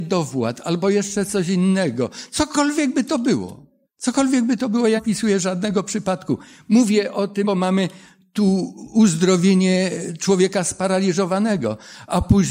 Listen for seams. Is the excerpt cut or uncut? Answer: cut